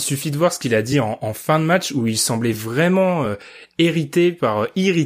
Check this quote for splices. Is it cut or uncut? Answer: uncut